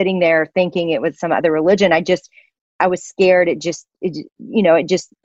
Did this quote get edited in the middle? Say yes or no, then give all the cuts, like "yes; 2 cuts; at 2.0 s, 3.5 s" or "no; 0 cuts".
no; 0 cuts